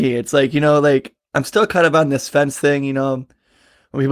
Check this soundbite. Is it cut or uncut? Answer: uncut